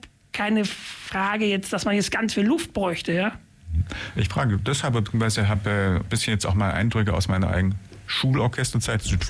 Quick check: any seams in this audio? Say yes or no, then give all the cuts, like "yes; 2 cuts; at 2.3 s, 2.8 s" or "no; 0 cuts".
no; 0 cuts